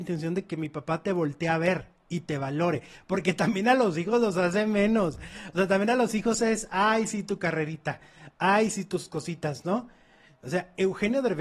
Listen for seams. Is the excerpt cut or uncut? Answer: uncut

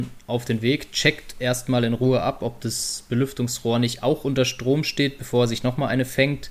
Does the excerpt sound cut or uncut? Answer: uncut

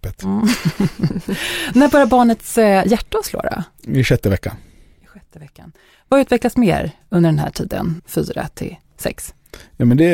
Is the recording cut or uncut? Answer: cut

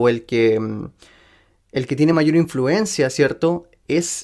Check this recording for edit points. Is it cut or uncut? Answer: uncut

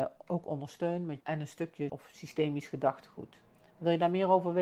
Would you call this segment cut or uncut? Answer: cut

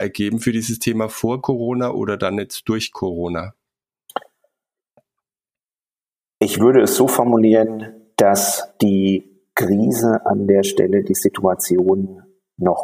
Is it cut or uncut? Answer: uncut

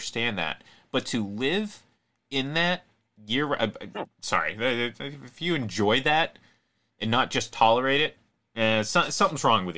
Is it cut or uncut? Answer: uncut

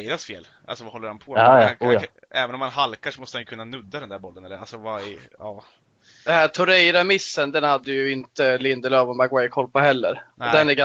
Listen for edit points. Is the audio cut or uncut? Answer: uncut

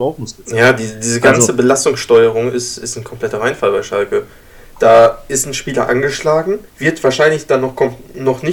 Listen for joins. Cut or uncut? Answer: cut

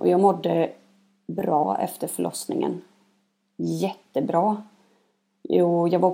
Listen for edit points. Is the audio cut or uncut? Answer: uncut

